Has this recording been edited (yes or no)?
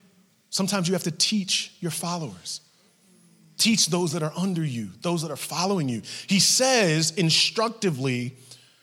no